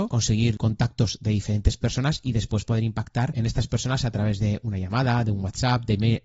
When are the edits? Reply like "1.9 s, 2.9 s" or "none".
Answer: none